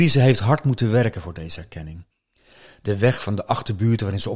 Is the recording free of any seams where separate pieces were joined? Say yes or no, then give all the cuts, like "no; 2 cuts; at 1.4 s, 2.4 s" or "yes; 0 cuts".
yes; 0 cuts